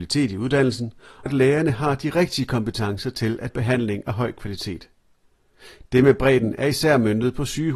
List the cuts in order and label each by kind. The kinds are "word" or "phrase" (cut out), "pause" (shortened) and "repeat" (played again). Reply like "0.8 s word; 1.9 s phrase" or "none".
1.3 s word; 3.5 s word